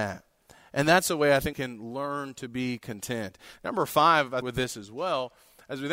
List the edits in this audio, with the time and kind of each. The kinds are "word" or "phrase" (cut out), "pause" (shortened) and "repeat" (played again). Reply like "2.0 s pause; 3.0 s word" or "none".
1.5 s word; 4.4 s phrase